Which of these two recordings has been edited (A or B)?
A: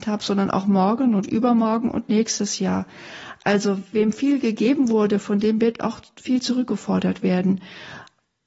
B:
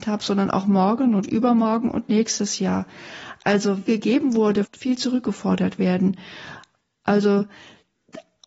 B